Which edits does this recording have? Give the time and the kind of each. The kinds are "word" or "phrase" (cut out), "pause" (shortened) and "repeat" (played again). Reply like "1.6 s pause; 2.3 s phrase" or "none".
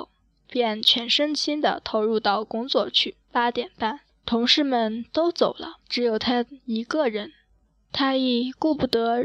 3.2 s pause; 4.1 s pause; 5.8 s pause; 7.6 s pause